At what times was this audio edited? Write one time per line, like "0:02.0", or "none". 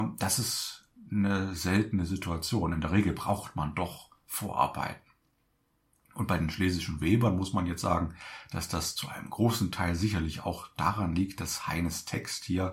none